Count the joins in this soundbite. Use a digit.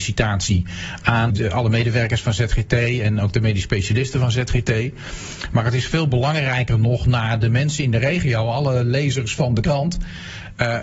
1